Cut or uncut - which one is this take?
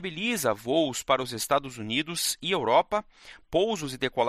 uncut